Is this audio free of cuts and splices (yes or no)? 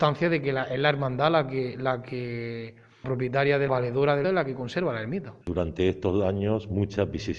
no